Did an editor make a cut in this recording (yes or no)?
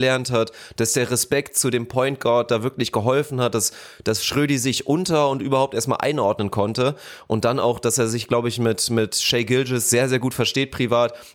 no